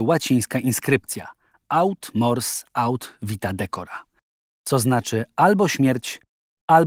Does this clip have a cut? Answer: no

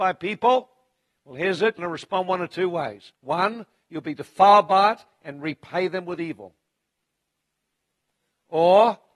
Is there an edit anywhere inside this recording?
yes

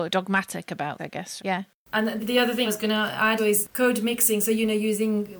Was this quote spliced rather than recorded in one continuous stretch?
yes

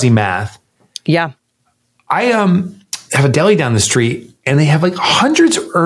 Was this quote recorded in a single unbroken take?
yes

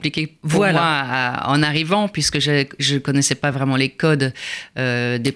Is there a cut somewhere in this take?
no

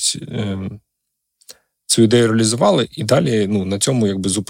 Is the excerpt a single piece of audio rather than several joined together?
yes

